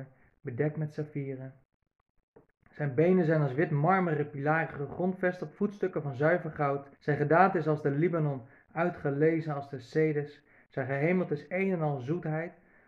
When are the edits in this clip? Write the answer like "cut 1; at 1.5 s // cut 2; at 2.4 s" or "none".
cut 1; at 6.9 s